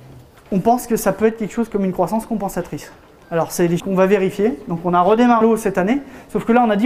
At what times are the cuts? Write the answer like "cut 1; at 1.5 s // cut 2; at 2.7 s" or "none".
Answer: cut 1; at 3.2 s // cut 2; at 3.8 s // cut 3; at 5.4 s